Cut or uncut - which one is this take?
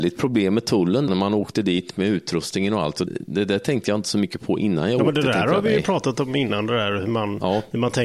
cut